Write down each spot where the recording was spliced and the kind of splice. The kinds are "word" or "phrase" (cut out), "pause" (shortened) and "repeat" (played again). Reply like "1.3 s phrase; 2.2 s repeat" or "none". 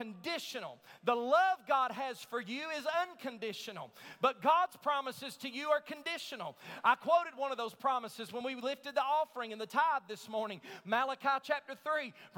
none